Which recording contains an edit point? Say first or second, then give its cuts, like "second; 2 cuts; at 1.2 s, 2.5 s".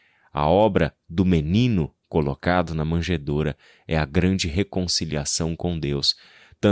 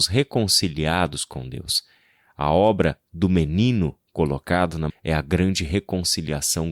second; 1 cut; at 4.9 s